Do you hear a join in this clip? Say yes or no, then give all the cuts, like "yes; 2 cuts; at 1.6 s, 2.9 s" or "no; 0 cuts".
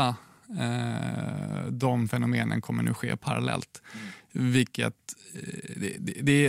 no; 0 cuts